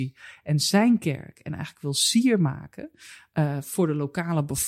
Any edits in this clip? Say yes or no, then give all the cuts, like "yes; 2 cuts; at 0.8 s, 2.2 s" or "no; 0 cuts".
no; 0 cuts